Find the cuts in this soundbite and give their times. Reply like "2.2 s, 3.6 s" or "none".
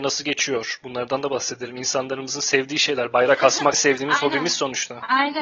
3.7 s